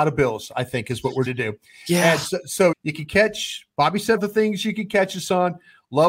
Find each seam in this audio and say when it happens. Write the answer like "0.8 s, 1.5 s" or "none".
1.3 s, 2.7 s, 4.2 s